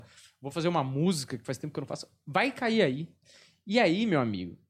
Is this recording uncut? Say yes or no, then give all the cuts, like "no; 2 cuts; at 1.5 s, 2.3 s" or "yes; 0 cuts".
yes; 0 cuts